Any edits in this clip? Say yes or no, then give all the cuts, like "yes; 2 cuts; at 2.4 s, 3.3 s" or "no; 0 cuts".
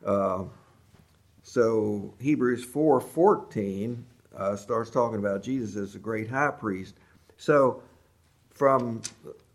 no; 0 cuts